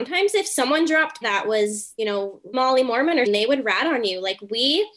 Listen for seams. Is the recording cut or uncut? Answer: cut